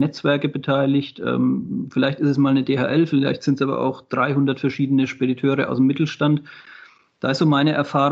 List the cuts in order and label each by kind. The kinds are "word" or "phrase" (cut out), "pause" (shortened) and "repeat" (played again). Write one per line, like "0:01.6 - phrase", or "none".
none